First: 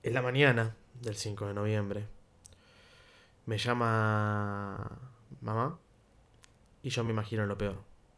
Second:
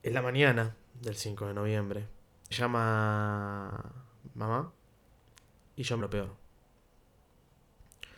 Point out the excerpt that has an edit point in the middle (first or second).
second